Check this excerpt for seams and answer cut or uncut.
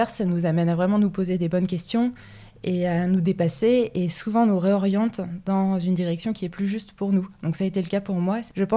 uncut